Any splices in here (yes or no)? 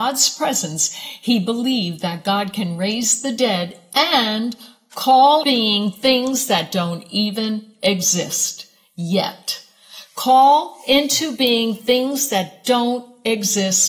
yes